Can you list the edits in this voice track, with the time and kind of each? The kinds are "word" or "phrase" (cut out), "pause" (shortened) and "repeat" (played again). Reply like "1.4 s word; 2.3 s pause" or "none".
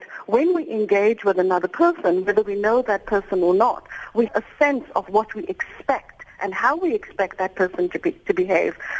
4.3 s word